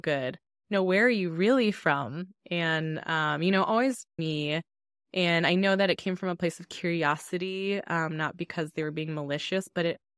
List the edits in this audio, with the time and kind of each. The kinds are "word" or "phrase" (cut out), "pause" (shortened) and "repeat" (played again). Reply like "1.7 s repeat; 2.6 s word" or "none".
4.2 s word